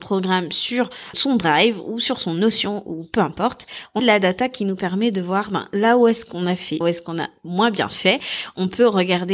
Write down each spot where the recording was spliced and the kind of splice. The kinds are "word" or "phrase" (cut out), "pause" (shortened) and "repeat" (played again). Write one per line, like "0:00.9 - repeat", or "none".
0:01.1 - word
0:04.0 - word
0:06.8 - phrase